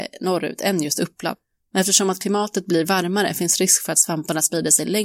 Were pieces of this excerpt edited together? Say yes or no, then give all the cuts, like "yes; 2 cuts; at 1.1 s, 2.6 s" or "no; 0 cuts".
no; 0 cuts